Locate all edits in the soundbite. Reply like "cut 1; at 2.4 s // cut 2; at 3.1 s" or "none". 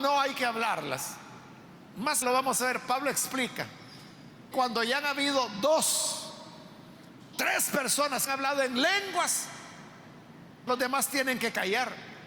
cut 1; at 2.2 s // cut 2; at 4.5 s // cut 3; at 7.3 s // cut 4; at 8.3 s // cut 5; at 10.7 s